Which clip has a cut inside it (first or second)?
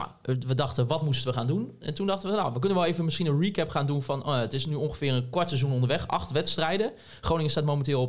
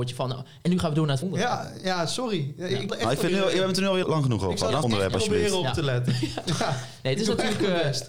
second